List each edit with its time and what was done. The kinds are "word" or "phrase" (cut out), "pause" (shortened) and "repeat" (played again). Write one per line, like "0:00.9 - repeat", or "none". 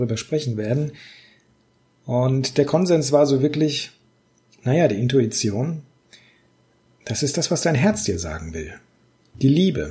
none